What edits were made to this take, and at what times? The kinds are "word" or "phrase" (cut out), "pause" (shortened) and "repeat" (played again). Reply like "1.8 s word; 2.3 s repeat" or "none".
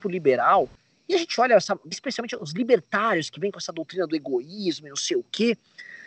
none